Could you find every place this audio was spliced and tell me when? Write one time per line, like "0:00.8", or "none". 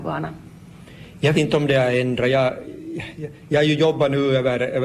0:01.3